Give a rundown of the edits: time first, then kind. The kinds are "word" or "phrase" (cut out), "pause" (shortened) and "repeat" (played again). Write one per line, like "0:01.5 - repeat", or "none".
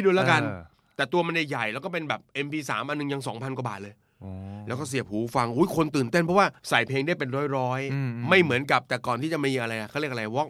0:06.6 - pause